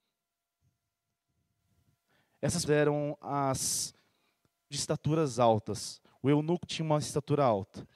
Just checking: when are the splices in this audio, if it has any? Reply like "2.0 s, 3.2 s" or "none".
2.7 s, 4.7 s, 6.7 s